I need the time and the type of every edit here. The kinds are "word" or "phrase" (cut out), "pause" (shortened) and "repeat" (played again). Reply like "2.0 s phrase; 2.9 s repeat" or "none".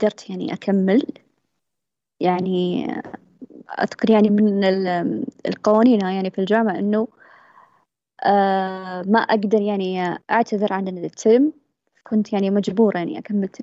10.2 s pause